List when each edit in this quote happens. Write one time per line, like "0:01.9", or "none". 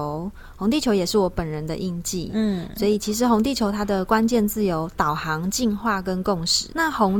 none